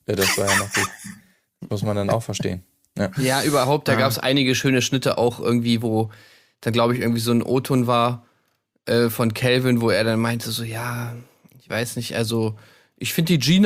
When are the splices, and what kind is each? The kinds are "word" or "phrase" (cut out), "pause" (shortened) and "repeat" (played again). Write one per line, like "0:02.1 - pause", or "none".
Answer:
none